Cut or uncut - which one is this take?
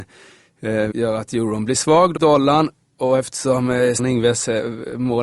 cut